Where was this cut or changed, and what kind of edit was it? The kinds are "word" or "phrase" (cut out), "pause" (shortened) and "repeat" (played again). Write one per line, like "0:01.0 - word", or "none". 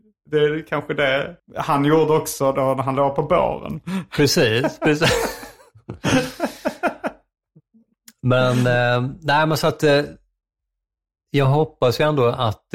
0:01.4 - pause